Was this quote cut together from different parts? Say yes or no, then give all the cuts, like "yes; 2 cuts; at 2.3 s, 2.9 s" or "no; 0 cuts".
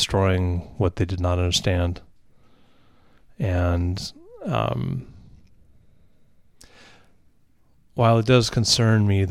no; 0 cuts